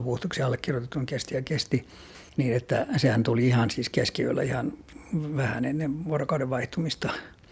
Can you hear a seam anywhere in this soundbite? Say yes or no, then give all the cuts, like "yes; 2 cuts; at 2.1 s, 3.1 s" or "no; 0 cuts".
no; 0 cuts